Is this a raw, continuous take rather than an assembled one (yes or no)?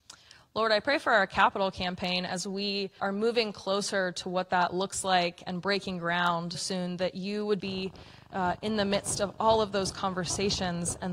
no